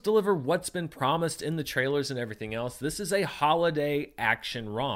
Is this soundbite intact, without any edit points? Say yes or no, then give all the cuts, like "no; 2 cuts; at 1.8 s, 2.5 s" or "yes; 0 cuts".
yes; 0 cuts